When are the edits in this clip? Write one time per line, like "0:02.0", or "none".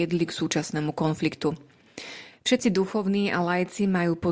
none

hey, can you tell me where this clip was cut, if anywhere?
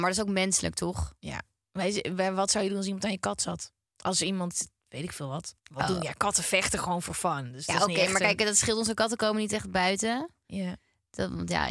0:03.8
0:05.6

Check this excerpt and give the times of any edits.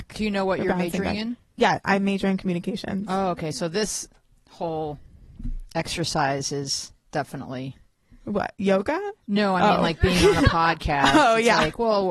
none

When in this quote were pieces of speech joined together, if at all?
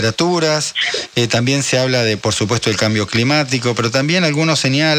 none

